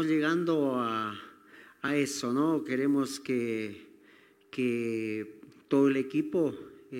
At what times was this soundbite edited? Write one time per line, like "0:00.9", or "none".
none